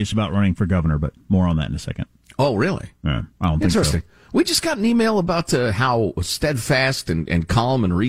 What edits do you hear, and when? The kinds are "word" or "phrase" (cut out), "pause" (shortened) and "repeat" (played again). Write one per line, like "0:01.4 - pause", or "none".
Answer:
none